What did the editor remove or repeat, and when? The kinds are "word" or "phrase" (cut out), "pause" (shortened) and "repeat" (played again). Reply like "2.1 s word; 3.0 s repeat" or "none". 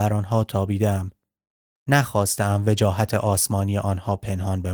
none